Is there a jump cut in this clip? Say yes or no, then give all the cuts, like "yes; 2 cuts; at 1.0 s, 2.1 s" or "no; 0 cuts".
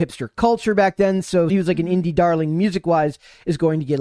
yes; 1 cut; at 1.5 s